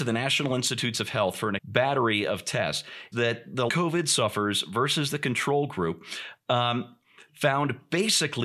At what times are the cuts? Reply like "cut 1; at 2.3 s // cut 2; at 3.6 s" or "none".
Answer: cut 1; at 1.6 s // cut 2; at 3.1 s // cut 3; at 3.7 s